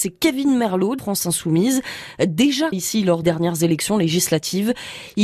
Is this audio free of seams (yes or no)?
no